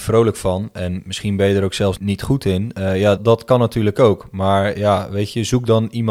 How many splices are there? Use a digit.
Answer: 2